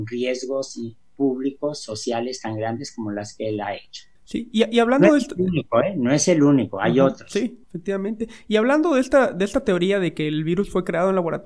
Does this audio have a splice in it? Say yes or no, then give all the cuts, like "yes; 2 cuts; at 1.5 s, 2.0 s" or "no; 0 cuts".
yes; 2 cuts; at 4.2 s, 7.6 s